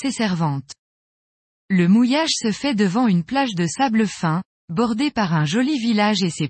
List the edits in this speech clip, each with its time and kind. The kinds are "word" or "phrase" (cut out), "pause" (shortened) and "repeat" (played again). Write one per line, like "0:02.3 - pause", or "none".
none